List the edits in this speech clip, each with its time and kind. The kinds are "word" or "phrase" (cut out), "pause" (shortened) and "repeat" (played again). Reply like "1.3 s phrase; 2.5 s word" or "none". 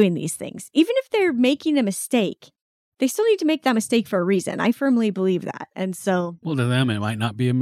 none

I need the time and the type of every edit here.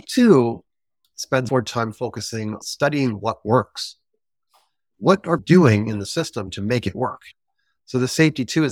1.5 s word; 2.6 s word; 5.4 s word

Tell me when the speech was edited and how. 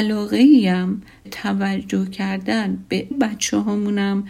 1.2 s word; 3.1 s word

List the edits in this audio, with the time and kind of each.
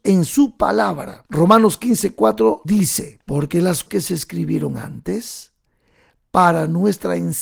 1.3 s pause; 2.6 s word; 3.2 s pause; 3.9 s word

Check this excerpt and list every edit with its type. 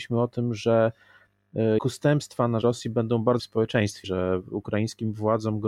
1.8 s word; 2.6 s word; 3.4 s word; 4.0 s word

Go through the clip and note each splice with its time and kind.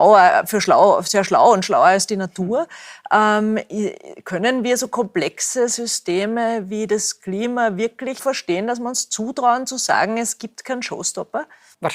8.2 s word

